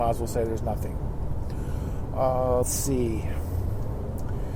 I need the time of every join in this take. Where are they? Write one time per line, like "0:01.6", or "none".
0:02.6